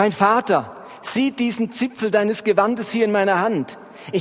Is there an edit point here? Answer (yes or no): no